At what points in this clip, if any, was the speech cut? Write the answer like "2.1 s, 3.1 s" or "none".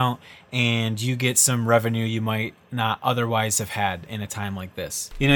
none